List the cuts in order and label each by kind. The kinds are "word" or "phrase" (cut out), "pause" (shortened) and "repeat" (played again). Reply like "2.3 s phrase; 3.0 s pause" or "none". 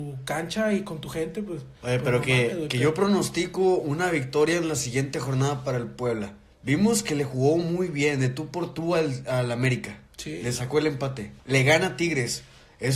1.8 s pause; 6.5 s pause; 10.1 s pause; 11.4 s pause